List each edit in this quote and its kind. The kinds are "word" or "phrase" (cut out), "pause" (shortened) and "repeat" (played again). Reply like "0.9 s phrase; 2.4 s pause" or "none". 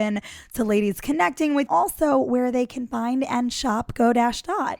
1.7 s phrase